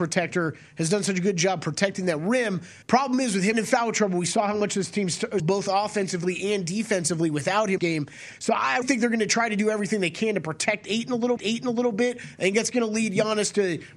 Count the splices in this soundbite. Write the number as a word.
six